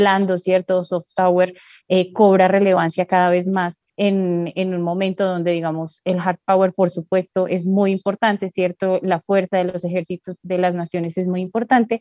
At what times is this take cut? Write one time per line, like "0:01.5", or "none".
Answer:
0:03.9